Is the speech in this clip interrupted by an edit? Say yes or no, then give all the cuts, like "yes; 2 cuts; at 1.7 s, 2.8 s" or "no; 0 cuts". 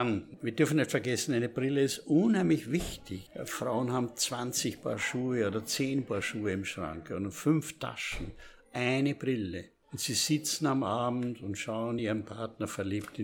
no; 0 cuts